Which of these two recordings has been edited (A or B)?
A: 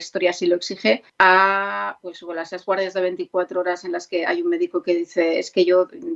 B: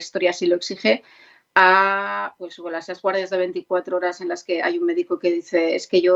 A